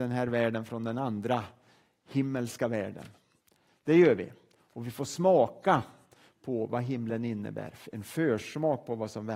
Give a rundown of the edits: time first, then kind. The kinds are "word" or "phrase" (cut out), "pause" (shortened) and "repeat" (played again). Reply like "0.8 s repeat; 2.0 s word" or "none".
none